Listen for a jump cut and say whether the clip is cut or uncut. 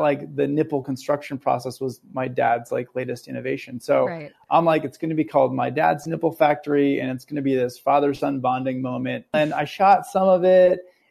uncut